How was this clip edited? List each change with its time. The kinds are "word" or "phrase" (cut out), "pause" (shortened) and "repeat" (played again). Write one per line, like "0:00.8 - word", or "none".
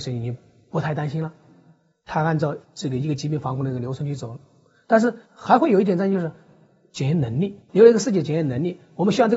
0:02.6 - pause
0:05.3 - pause
0:07.6 - pause